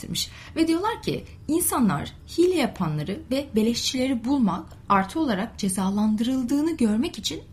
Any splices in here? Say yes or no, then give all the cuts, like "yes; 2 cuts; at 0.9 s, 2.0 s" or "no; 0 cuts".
no; 0 cuts